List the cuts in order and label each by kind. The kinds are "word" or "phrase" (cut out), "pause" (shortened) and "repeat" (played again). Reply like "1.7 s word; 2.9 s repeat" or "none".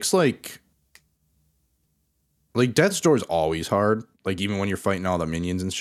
4.1 s pause

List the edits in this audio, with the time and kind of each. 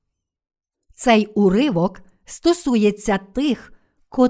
none

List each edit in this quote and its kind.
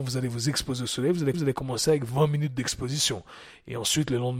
1.3 s repeat

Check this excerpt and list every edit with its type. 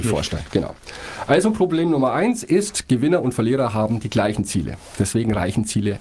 none

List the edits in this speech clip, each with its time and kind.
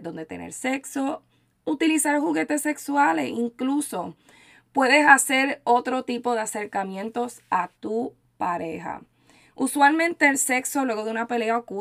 none

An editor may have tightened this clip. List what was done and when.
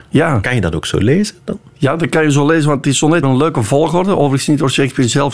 3.2 s word

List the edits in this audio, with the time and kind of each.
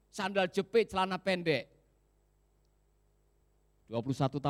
none

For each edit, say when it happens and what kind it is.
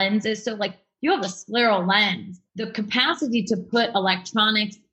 2.5 s pause

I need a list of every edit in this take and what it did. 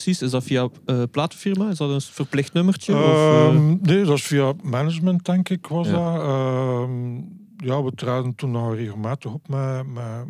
7.5 s pause

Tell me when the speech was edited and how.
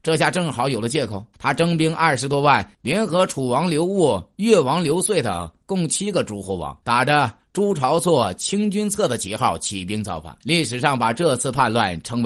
1.3 s pause; 6.8 s pause; 10.4 s pause

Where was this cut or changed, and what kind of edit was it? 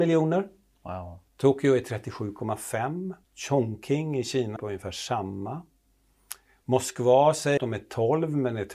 1.3 s pause; 3.2 s pause; 4.6 s word; 7.6 s word

